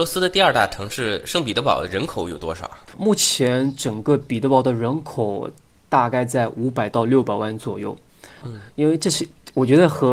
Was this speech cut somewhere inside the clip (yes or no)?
yes